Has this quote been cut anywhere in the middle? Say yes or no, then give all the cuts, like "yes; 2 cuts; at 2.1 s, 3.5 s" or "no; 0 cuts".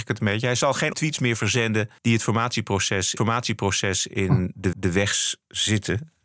yes; 4 cuts; at 0.9 s, 2.0 s, 3.2 s, 4.7 s